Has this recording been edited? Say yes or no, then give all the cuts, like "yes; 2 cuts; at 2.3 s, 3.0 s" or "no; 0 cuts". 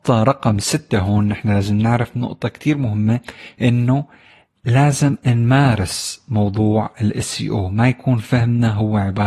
no; 0 cuts